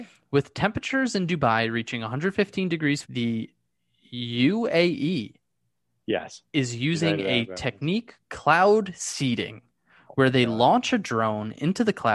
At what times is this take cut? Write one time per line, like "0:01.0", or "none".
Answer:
0:03.0
0:08.2